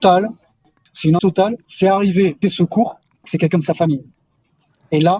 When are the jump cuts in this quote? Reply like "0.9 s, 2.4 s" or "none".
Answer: 1.2 s, 2.4 s, 3.2 s